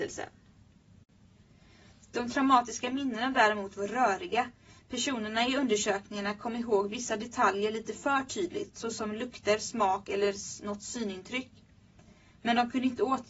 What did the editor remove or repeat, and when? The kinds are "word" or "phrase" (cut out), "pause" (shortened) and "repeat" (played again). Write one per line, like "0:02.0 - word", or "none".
none